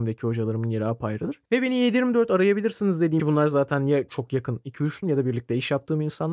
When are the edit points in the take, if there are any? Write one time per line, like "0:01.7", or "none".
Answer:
0:03.2
0:04.1
0:05.0

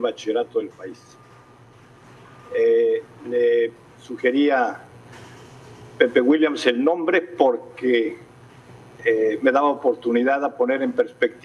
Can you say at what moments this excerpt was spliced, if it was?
0:03.9

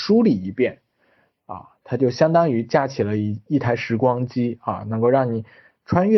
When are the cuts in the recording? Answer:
none

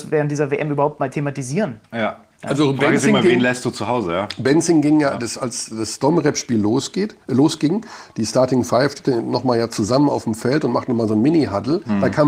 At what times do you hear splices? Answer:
0:07.2

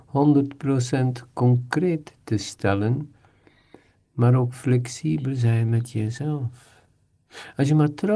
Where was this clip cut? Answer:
none

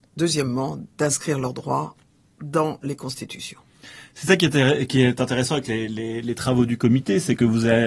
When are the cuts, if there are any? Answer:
none

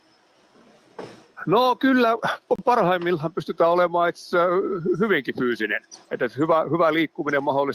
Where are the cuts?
0:06.0

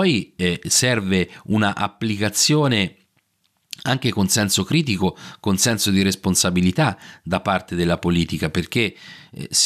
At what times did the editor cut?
none

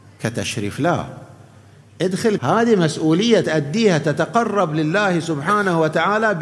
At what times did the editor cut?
0:02.4
0:03.4

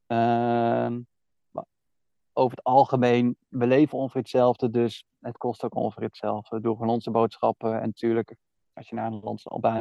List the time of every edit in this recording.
none

